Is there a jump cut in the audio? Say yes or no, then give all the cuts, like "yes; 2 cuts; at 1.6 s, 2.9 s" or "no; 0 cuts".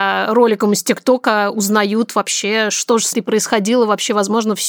yes; 1 cut; at 3.1 s